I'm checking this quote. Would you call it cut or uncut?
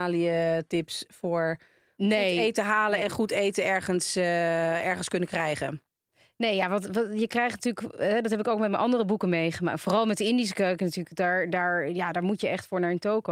uncut